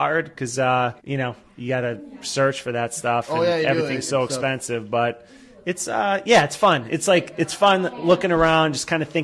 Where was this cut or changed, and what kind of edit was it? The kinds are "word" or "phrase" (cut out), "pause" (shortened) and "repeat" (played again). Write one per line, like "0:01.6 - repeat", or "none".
0:01.0 - pause